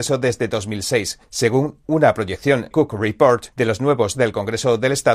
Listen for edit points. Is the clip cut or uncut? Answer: cut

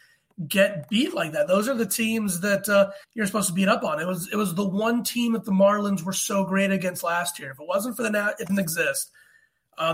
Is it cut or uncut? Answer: cut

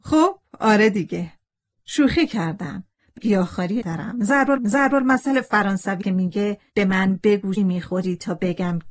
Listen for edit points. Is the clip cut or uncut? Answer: cut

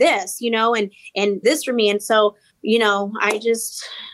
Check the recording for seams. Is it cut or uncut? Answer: cut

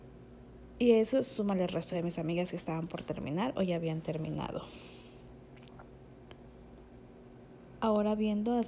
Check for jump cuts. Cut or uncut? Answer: uncut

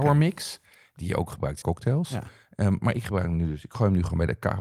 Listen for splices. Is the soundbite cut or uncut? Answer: cut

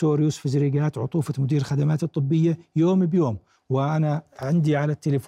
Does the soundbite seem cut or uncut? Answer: uncut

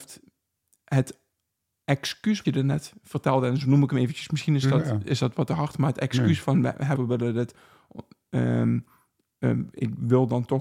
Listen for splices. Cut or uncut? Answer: cut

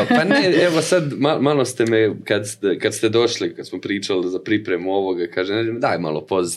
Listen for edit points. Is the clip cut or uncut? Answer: uncut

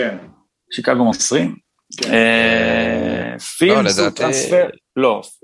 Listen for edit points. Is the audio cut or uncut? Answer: cut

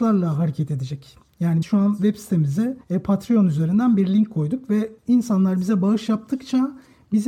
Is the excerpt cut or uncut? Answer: cut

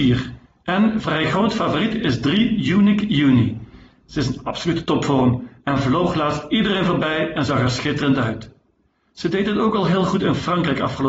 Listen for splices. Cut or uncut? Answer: uncut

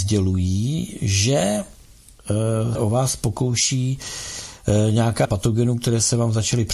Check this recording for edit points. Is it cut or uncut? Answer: cut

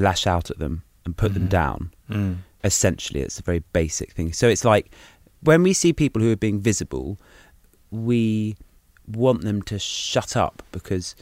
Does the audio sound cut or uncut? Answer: uncut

